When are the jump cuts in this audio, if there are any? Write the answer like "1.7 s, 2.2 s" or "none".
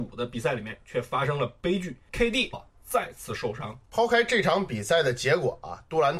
2.5 s, 3.8 s